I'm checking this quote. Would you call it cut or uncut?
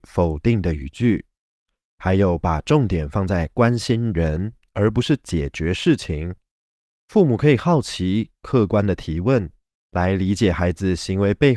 uncut